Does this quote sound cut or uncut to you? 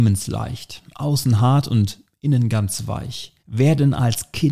cut